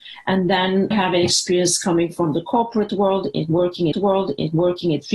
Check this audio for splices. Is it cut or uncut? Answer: cut